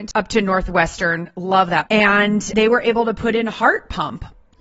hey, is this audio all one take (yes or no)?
no